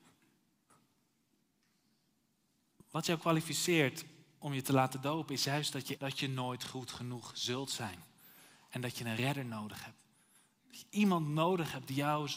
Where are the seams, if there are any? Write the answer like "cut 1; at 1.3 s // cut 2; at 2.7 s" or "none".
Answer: cut 1; at 6.0 s